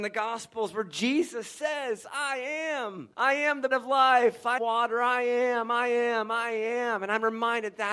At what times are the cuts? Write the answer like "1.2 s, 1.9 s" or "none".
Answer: 3.1 s, 3.7 s, 4.6 s